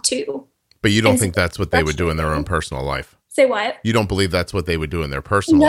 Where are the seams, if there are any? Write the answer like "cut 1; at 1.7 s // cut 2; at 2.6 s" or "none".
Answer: cut 1; at 3.2 s